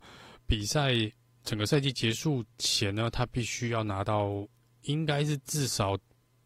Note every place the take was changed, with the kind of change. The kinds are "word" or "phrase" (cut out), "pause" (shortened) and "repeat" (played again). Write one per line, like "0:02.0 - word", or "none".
0:02.5 - pause